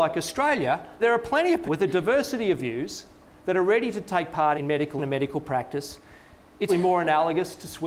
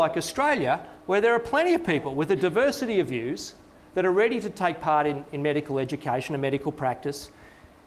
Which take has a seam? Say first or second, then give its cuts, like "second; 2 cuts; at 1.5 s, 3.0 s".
first; 5 cuts; at 1.0 s, 1.6 s, 4.5 s, 5.0 s, 6.7 s